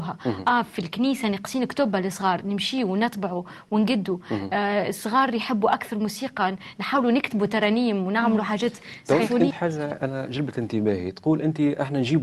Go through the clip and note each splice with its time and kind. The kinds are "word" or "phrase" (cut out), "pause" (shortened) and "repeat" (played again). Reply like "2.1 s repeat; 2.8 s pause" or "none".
9.5 s word